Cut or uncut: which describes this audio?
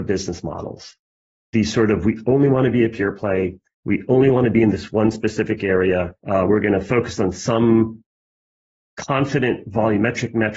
cut